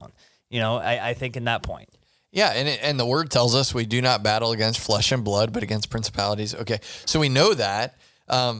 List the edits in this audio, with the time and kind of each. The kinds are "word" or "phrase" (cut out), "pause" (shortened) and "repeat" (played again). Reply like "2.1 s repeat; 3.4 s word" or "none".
none